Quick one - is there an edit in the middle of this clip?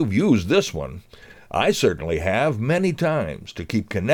no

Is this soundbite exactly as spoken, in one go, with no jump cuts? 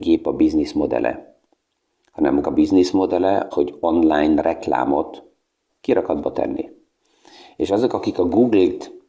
no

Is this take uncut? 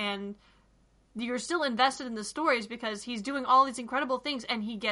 yes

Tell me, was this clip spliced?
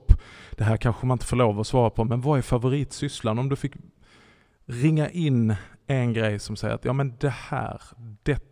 no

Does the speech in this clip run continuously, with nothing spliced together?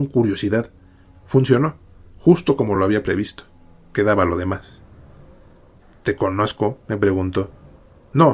yes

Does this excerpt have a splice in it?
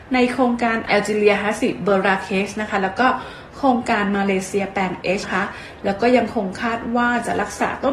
yes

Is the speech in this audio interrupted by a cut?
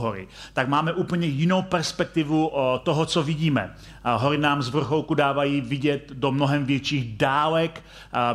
no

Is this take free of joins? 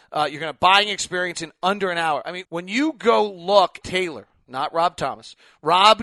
no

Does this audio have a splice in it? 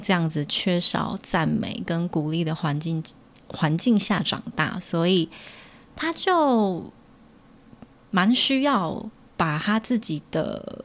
no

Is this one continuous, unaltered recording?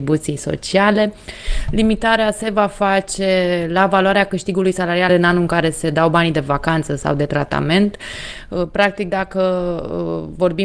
no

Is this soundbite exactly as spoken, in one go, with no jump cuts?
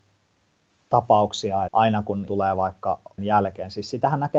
no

